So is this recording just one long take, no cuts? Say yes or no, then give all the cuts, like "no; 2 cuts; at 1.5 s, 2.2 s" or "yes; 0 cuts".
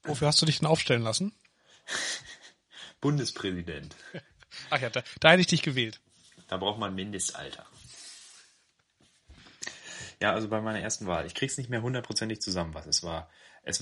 yes; 0 cuts